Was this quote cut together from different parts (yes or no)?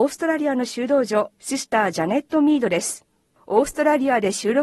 no